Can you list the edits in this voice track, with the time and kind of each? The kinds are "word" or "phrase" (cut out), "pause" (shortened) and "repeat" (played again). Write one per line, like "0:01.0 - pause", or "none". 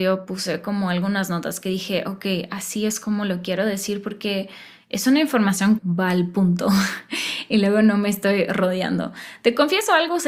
0:05.8 - word